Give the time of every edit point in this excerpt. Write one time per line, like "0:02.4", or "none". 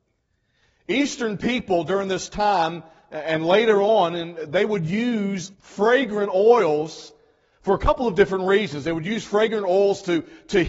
0:05.5

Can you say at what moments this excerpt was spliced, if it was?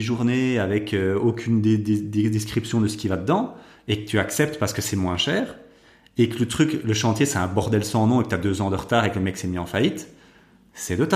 none

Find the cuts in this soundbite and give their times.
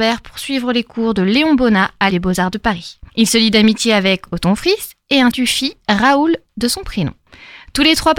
0:02.1
0:03.1
0:05.3

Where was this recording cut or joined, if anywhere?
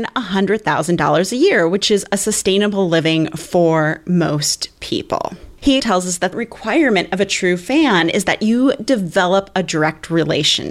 0:05.8
0:06.3

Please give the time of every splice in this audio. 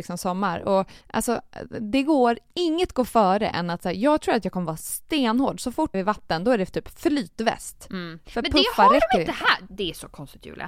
0:01.0
0:05.9
0:09.7

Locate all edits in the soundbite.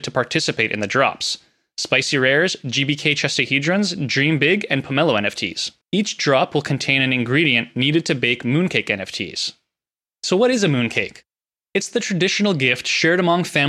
0:05.8

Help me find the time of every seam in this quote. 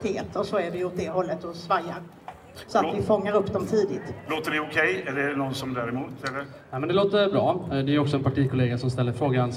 none

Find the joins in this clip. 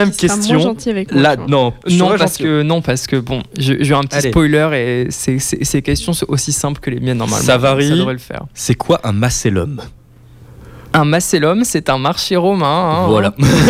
none

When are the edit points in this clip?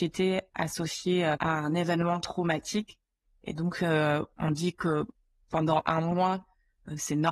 0:01.4

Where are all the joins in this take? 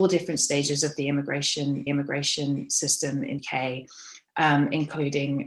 0:01.9
0:03.4

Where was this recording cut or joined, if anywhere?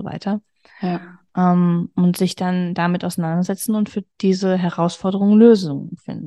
none

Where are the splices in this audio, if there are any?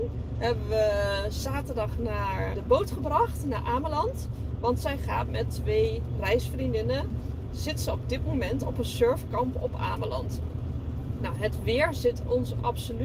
0:02.5

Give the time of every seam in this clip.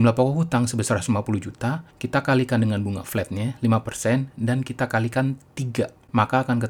0:01.9

